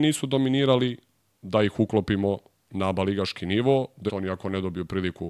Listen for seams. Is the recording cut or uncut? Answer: cut